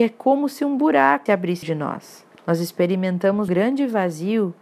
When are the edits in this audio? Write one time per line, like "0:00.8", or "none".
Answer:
0:01.3
0:01.6
0:02.3
0:03.5